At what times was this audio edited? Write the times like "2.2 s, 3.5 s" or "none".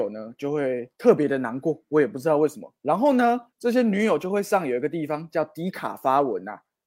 0.9 s, 2.8 s, 3.5 s